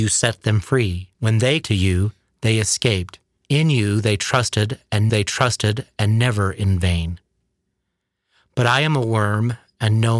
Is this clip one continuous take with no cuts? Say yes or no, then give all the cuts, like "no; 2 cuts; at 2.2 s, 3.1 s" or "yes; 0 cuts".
no; 4 cuts; at 1.1 s, 1.6 s, 3.4 s, 5.1 s